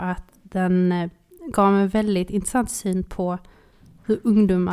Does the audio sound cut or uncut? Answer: uncut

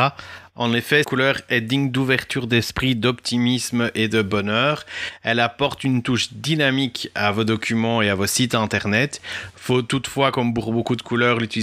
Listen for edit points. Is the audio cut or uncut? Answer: cut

